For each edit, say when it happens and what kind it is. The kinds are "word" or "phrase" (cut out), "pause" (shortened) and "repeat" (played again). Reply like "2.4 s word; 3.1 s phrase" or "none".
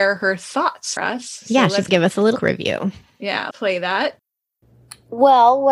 1.0 s word; 1.9 s word; 2.4 s word; 3.5 s word